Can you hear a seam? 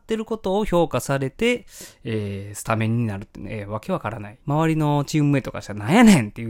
yes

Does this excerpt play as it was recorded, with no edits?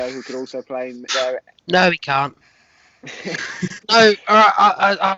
no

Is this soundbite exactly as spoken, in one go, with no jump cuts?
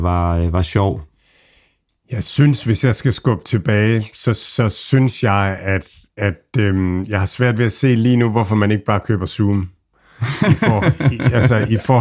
yes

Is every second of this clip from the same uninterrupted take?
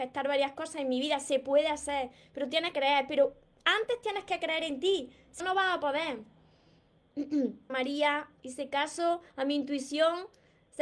no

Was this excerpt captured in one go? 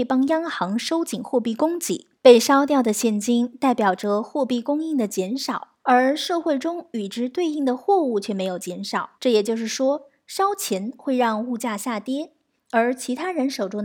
no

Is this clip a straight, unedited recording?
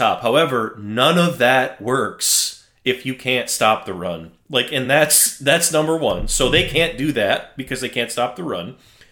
yes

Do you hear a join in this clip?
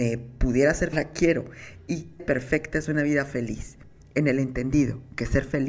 yes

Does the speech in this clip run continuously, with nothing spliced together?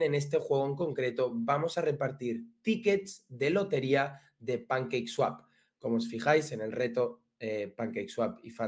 yes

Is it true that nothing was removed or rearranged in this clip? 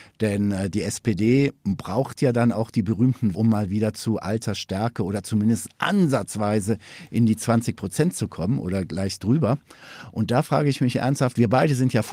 no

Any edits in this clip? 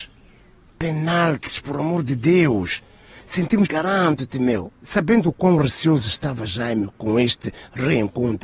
yes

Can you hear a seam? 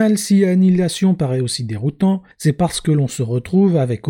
yes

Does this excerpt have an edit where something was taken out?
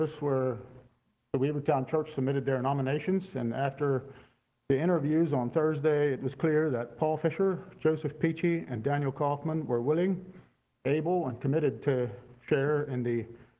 no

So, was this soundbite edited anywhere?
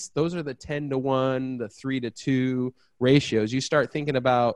no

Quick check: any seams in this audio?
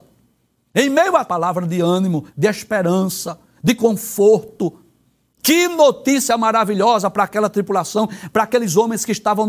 yes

